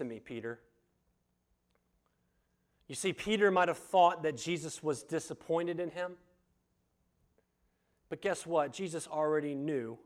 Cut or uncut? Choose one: uncut